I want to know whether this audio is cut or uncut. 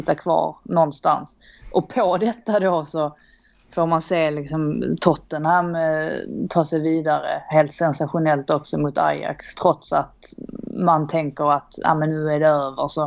uncut